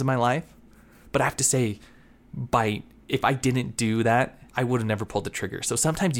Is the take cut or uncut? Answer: cut